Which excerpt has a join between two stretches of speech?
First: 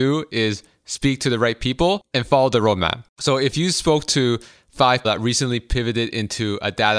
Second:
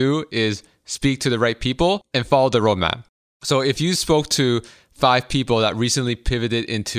first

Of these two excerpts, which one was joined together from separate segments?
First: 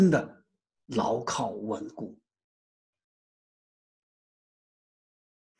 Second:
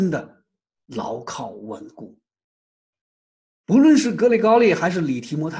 second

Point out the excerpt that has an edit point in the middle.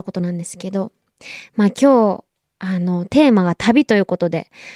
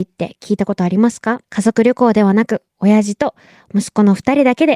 second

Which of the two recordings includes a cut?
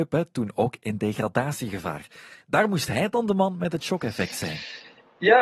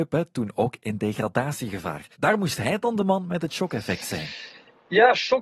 second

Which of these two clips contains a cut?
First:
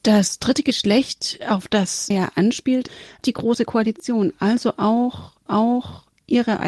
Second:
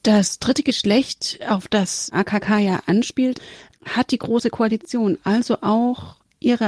first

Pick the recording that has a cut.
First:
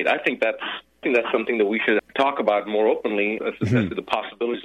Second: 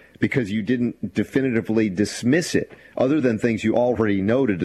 first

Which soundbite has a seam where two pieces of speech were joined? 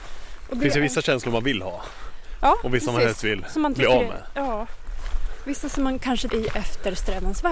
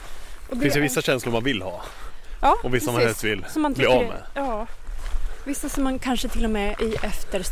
first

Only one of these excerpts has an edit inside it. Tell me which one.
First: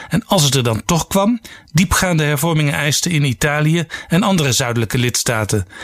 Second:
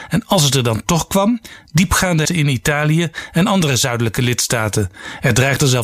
second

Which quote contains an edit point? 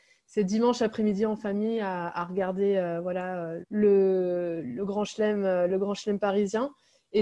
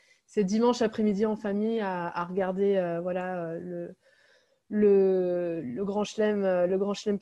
first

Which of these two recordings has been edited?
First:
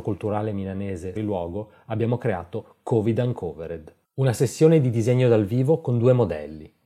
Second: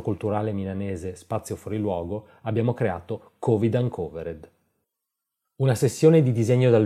first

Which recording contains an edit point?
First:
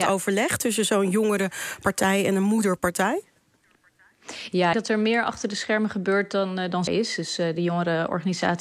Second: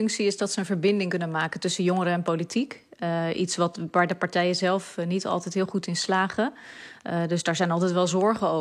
first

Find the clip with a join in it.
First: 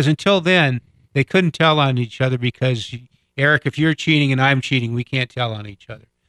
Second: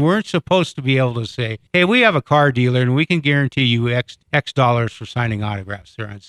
second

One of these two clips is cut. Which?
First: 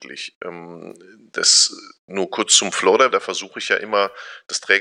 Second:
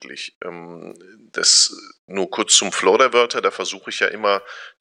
first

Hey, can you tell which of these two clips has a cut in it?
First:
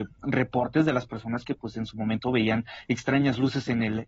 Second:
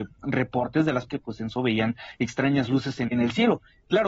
second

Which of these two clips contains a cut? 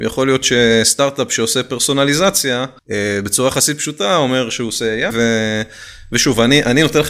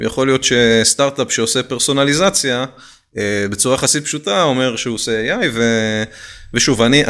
first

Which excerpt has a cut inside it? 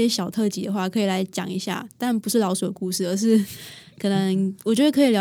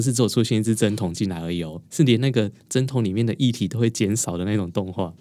second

